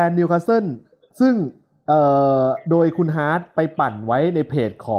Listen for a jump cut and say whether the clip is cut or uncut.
uncut